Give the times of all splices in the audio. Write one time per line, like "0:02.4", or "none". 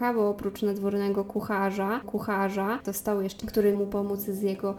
0:02.0
0:03.4
0:03.7